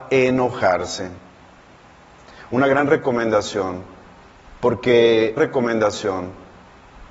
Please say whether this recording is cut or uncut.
cut